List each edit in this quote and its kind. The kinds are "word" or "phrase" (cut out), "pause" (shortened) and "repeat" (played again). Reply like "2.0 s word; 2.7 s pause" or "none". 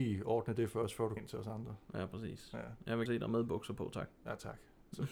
1.2 s word; 3.1 s word